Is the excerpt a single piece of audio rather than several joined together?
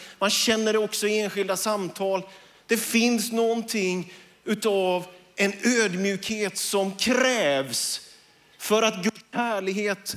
yes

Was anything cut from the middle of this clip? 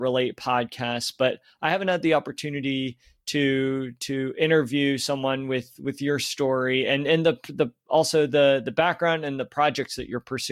no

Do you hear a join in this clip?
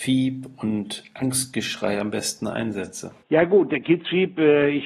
yes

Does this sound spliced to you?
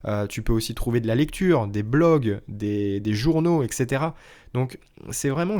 no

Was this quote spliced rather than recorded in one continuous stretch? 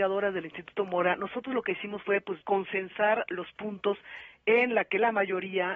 yes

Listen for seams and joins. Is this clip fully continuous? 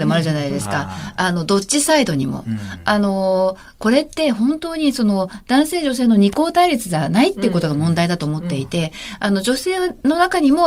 yes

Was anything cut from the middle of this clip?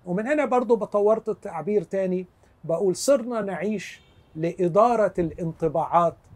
no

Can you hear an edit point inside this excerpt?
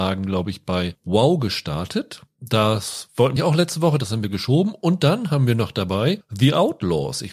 yes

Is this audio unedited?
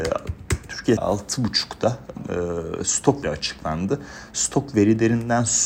no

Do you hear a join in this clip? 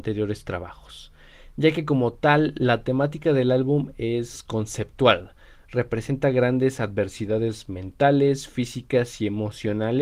no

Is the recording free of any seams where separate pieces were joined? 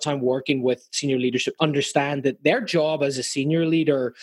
no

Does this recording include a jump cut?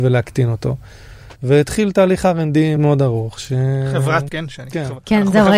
yes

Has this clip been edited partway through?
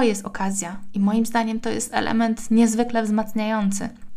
no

